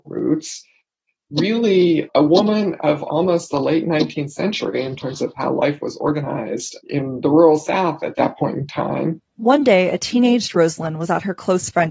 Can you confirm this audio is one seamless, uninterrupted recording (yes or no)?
yes